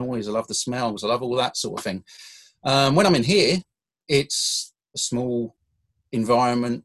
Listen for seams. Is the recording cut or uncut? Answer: uncut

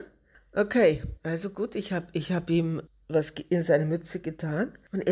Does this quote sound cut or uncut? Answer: uncut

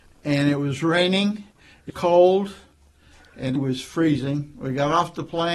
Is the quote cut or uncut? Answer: cut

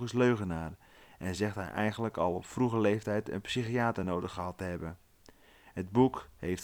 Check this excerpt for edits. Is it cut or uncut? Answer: uncut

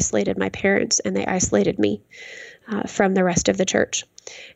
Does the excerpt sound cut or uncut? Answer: uncut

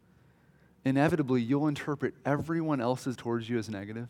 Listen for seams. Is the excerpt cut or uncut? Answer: cut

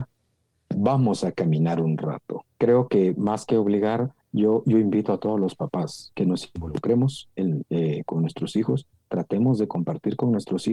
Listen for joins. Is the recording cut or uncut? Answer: cut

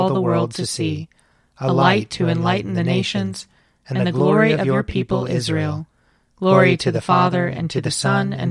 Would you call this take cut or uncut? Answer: uncut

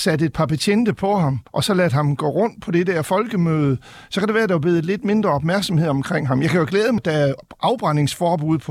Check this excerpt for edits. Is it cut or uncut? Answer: cut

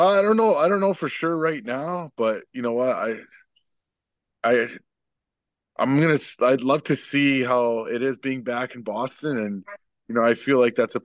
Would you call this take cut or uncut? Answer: uncut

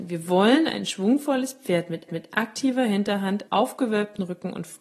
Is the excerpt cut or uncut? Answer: cut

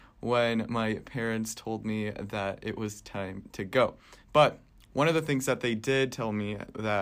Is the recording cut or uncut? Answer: cut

